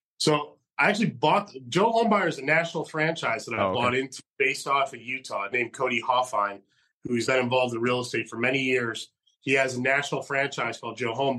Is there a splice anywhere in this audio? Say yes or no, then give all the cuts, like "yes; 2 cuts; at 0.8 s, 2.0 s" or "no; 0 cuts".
yes; 2 cuts; at 5.5 s, 7.3 s